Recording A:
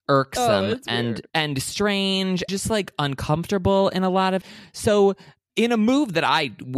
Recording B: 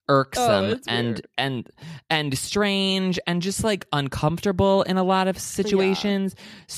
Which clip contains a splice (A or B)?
A